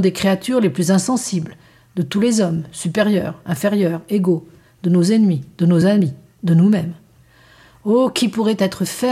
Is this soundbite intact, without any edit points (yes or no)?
yes